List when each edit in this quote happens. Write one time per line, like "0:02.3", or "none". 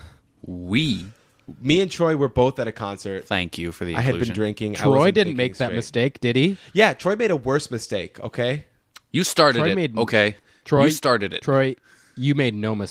none

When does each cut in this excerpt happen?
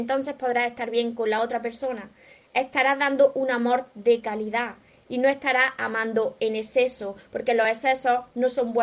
none

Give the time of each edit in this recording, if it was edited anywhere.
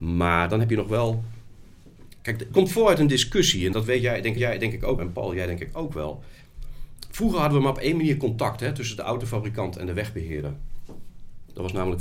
0:02.5
0:03.7
0:04.4
0:05.0

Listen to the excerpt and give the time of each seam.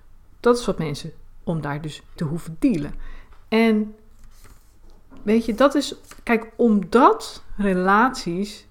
0:01.4
0:02.2

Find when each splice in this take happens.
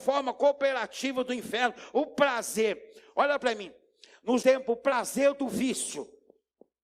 0:04.4

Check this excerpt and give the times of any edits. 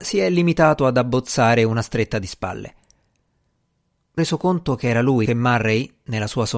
0:04.2
0:05.3

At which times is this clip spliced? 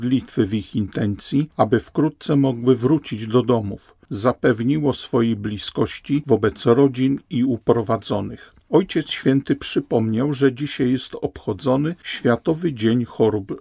none

